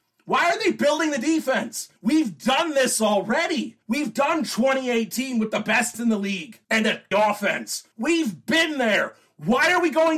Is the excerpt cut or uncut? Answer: cut